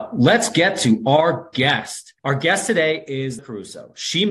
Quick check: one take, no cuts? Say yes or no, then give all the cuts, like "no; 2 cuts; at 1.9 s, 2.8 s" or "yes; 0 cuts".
no; 2 cuts; at 2.2 s, 3.4 s